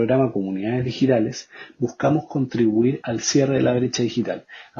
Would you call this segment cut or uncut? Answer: uncut